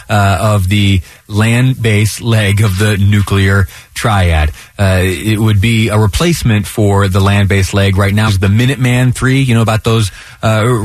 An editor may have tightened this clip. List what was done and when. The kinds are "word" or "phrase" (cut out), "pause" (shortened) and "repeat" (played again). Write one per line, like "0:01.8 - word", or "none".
0:08.3 - word